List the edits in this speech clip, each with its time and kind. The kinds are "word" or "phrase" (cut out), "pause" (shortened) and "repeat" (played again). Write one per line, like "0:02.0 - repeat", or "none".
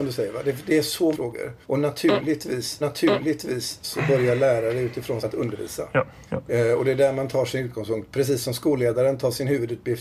0:01.1 - word
0:01.6 - pause
0:02.8 - repeat
0:05.2 - phrase
0:06.3 - pause